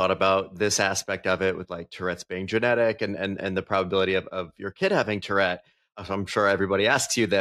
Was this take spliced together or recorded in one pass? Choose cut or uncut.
uncut